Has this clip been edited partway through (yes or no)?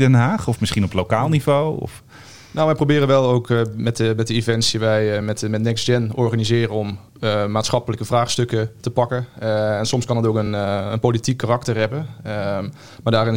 no